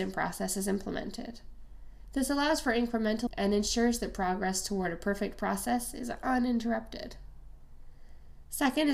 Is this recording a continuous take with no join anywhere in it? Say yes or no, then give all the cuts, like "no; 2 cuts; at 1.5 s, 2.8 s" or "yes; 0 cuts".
no; 1 cut; at 3.3 s